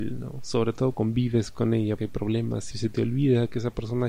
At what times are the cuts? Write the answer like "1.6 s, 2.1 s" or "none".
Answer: 0.9 s, 2.0 s, 2.7 s

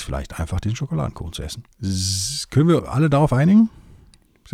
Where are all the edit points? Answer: 1.7 s, 2.8 s

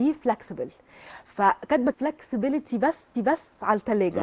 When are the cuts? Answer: 1.9 s, 3.1 s

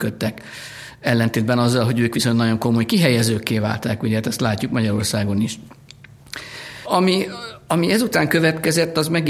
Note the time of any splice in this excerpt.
none

